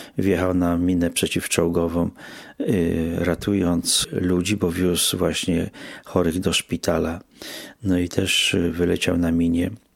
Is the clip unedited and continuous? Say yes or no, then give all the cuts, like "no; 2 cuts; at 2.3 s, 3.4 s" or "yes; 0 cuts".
yes; 0 cuts